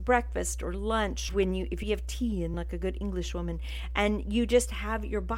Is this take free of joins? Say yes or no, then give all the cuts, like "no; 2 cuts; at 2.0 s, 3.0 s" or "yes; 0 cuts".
no; 3 cuts; at 1.3 s, 1.8 s, 2.5 s